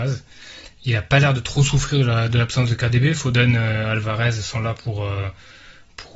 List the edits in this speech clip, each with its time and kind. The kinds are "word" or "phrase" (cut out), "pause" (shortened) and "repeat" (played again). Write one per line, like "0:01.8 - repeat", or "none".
none